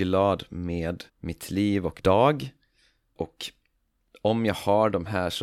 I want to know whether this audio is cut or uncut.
cut